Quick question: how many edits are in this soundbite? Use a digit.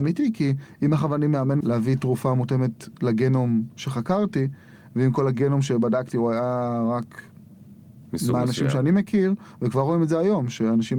1